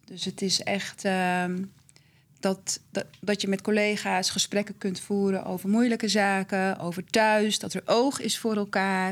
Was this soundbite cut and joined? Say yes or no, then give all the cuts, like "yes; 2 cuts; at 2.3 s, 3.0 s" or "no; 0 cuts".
no; 0 cuts